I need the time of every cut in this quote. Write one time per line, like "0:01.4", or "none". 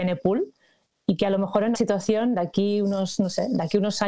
0:01.8